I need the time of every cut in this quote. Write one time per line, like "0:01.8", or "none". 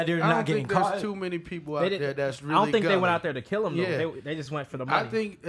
none

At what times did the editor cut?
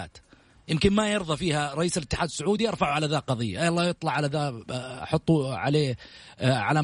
none

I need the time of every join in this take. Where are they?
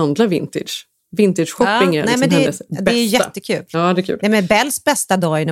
0:01.0

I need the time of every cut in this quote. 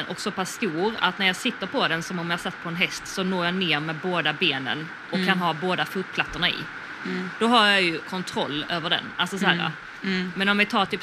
0:08.0

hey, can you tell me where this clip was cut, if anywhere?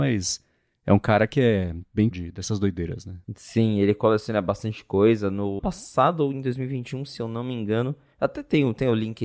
0:02.1
0:03.2
0:05.6

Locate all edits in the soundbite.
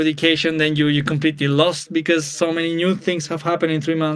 none

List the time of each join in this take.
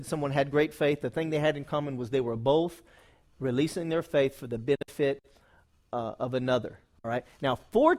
none

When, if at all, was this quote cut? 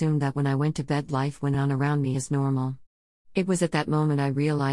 none

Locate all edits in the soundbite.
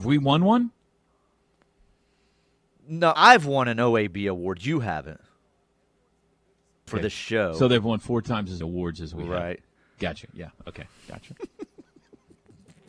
0:03.2
0:06.9
0:08.6

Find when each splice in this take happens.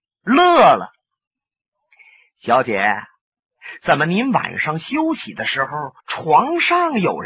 0:06.0

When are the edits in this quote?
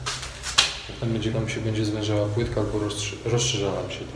0:01.3

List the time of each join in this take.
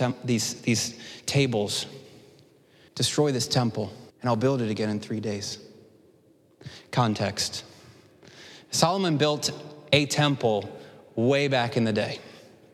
0:04.1

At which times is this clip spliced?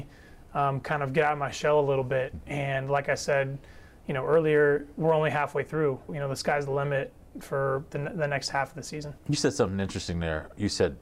0:06.1

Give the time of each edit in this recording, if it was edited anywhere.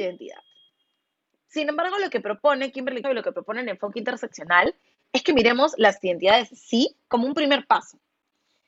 0:03.0

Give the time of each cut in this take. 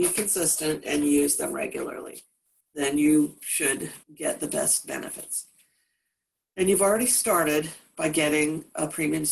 0:02.6
0:04.0

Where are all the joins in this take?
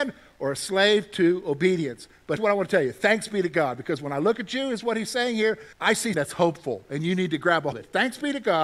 0:02.4
0:05.7
0:06.1
0:07.7

